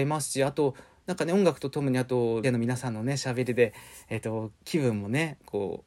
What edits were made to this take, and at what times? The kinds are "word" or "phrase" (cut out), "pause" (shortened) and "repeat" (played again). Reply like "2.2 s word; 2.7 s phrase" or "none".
2.4 s word